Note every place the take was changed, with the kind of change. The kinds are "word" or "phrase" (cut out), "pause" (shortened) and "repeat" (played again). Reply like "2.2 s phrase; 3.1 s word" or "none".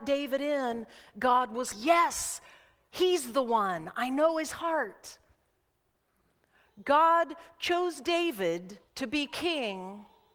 1.7 s word; 8.9 s pause